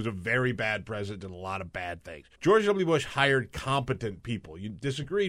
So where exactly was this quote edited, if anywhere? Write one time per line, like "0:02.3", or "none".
0:02.3